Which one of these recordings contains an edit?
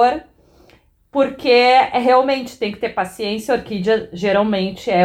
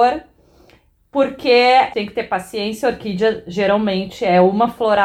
second; 1 cut; at 1.9 s

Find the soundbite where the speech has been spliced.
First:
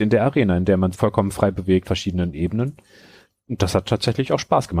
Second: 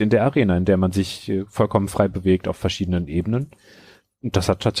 first; 2 cuts; at 0.9 s, 1.8 s

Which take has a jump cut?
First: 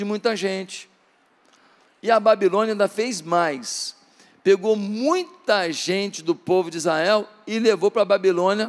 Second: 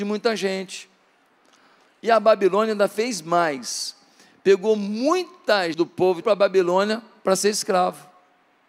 second; 2 cuts; at 5.7 s, 6.2 s

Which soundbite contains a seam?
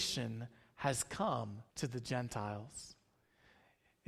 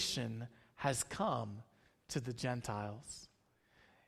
first; 1 cut; at 1.7 s

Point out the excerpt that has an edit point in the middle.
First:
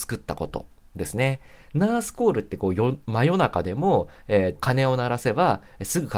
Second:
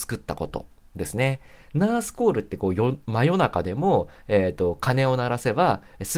first; 1 cut; at 4.6 s

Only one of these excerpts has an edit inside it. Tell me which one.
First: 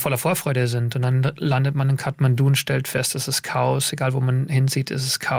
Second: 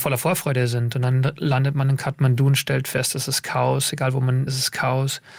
second; 1 cut; at 4.5 s

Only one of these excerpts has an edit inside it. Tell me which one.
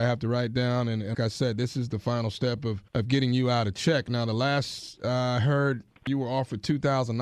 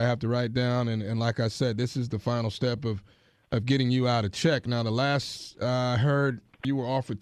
first; 2 cuts; at 1.1 s, 2.9 s

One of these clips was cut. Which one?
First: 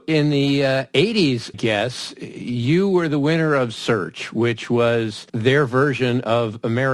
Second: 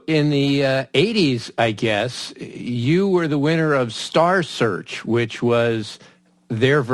first; 3 cuts; at 1.5 s, 3.7 s, 5.3 s

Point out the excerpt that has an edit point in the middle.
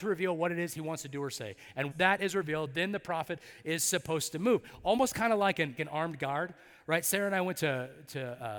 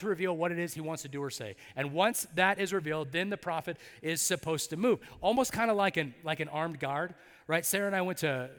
first; 2 cuts; at 1.9 s, 5.8 s

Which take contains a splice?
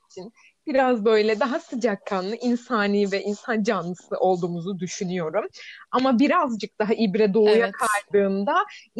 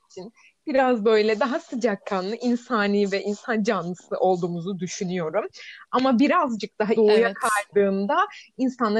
second; 1 cut; at 7.0 s

